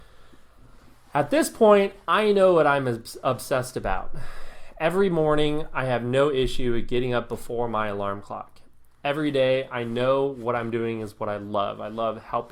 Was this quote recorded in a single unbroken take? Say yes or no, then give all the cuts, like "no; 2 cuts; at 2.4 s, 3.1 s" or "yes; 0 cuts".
yes; 0 cuts